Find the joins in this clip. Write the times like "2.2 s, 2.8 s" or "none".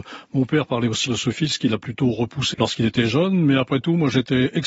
1.1 s, 2.5 s

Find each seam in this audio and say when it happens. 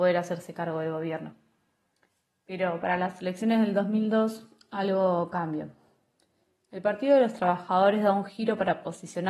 none

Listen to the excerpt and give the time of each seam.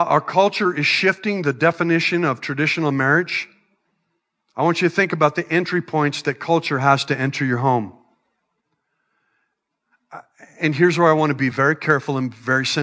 none

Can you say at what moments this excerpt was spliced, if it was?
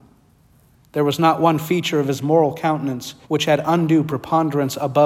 3.2 s

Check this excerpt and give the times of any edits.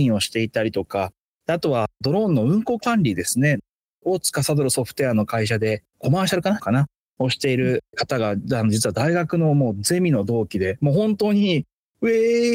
6.6 s

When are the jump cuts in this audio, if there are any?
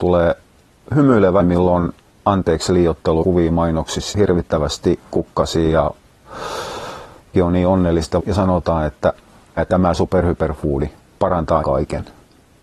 1.4 s, 3.2 s, 4.1 s, 7.3 s, 8.2 s, 9.6 s, 11.6 s

